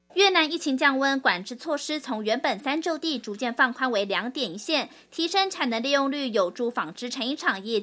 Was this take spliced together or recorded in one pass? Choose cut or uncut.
uncut